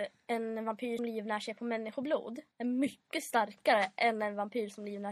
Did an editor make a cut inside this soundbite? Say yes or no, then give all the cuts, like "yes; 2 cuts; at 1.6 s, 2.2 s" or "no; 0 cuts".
yes; 2 cuts; at 1.0 s, 2.5 s